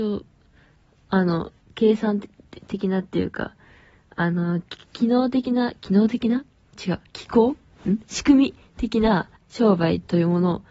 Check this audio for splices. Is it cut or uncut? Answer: cut